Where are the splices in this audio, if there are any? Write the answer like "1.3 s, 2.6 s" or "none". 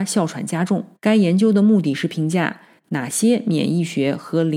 1.0 s